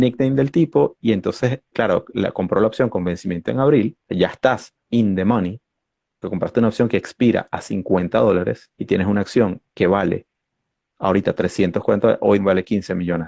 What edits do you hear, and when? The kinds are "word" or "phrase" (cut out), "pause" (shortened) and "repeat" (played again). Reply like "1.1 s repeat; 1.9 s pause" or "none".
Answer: 1.7 s word; 4.0 s pause; 6.2 s word; 8.7 s pause; 9.7 s word; 12.4 s phrase